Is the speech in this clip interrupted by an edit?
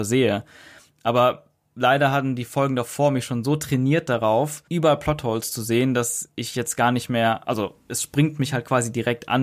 yes; 1 cut; at 4.7 s

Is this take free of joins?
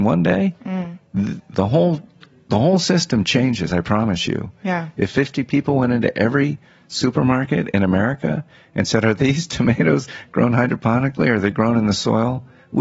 yes; 0 cuts

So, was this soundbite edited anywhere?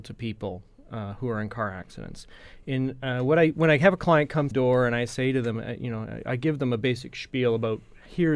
yes; 1 cut; at 4.5 s

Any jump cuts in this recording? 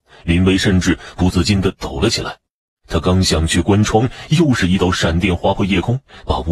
no; 0 cuts

